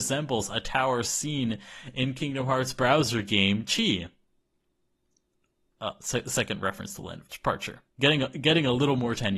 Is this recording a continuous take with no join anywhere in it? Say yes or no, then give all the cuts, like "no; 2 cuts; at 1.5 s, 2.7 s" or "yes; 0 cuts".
yes; 0 cuts